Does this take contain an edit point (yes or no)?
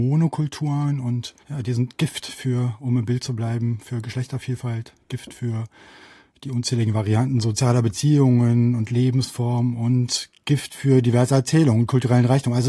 yes